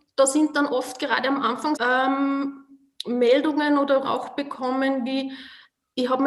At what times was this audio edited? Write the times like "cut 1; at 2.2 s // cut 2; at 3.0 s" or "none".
cut 1; at 1.8 s // cut 2; at 4.0 s